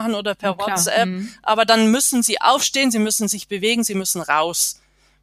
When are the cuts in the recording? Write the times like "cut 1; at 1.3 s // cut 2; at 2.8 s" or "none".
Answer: none